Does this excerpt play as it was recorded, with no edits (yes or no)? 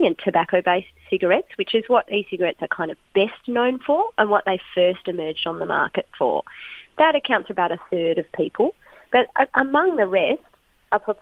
yes